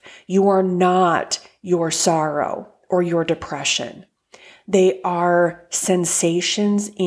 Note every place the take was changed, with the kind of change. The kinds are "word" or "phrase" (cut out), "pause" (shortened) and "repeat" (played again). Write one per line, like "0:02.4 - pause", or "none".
none

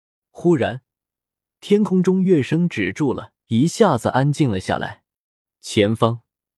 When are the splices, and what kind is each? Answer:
0:03.4 - pause

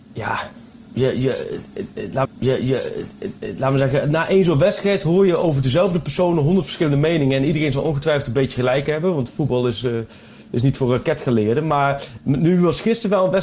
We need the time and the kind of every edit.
0:02.2 - repeat

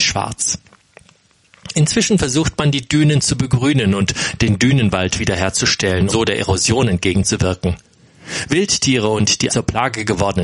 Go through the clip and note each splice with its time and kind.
0:06.1 - word
0:09.5 - word

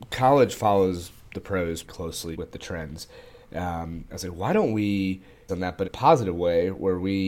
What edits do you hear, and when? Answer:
0:01.8 - word
0:02.3 - word
0:05.5 - word
0:05.8 - word

